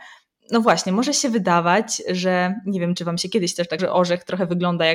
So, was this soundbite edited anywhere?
yes; 1 cut; at 3.8 s

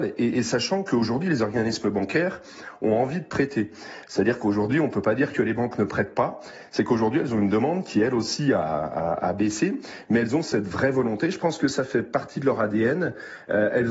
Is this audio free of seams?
yes; 0 cuts

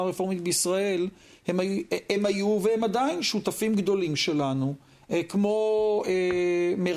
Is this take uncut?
yes; 0 cuts

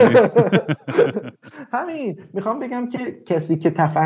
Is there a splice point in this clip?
no; 0 cuts

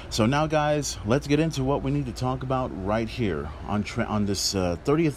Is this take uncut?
yes; 0 cuts

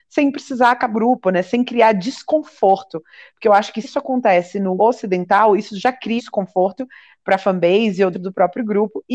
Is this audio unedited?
no; 5 cuts; at 0.9 s, 3.8 s, 4.8 s, 6.2 s, 8.1 s

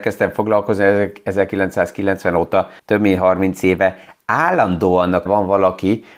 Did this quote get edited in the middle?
yes; 2 cuts; at 2.8 s, 5.3 s

